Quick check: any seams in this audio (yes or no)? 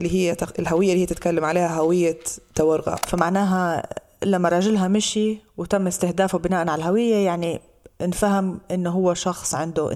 no